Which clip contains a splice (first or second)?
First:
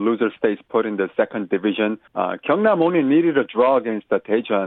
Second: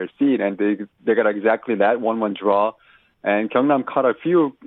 first